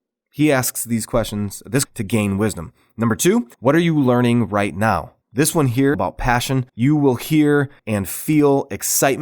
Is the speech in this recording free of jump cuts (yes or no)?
no